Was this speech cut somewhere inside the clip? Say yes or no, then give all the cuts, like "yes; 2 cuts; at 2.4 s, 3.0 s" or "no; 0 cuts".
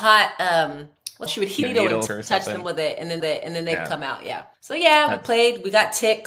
yes; 5 cuts; at 1.3 s, 1.6 s, 2.1 s, 3.2 s, 4.5 s